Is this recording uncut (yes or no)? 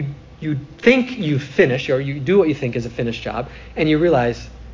yes